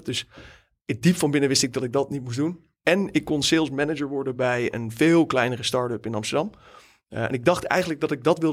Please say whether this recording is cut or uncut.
uncut